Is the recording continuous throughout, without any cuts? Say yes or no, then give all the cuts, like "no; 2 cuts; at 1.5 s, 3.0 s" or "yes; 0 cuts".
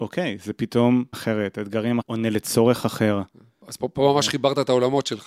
no; 2 cuts; at 1.1 s, 2.0 s